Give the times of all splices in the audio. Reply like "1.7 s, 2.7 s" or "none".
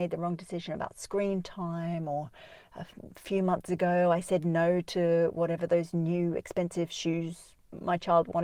none